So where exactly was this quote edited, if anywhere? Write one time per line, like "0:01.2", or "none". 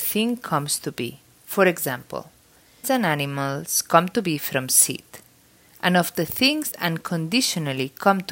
0:01.3
0:02.8
0:06.7